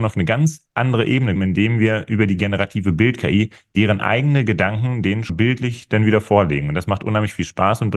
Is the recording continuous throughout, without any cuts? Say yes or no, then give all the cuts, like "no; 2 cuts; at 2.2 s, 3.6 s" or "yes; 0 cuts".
no; 2 cuts; at 1.4 s, 5.3 s